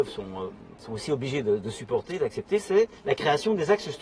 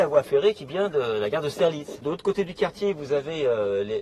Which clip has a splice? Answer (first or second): first